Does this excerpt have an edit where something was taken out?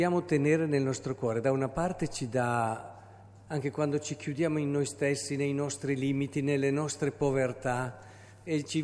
no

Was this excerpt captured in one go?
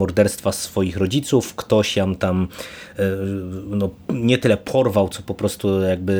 yes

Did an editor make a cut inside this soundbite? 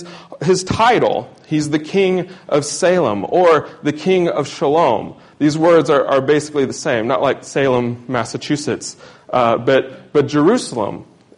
no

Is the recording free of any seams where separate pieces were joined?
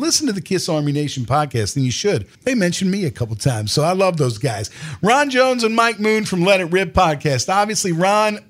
no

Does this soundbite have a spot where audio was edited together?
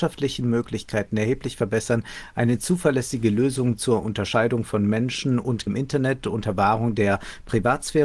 yes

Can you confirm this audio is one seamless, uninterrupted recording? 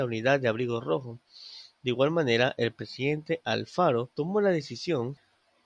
no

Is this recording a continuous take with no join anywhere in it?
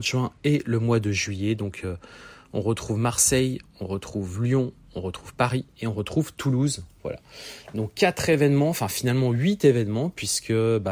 yes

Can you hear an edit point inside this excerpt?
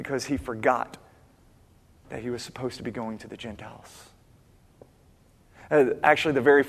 no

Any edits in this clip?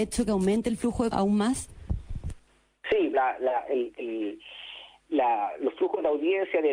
yes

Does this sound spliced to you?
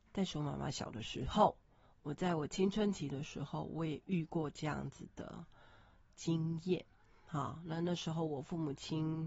no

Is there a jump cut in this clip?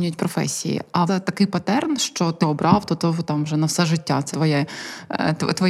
yes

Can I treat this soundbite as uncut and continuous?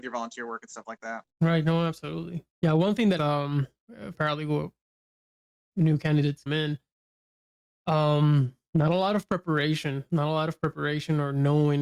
no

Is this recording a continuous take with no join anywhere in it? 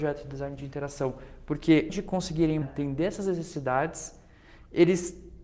no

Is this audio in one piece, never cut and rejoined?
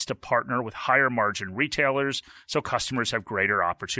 yes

